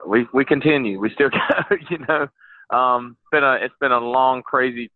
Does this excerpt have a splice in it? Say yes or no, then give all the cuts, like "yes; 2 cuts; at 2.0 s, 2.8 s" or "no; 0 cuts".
yes; 1 cut; at 3.3 s